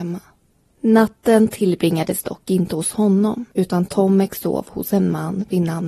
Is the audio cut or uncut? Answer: cut